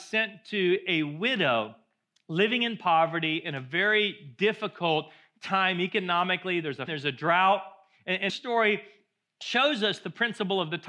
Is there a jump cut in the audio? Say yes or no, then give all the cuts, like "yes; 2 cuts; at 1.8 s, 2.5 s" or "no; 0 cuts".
yes; 2 cuts; at 6.9 s, 8.3 s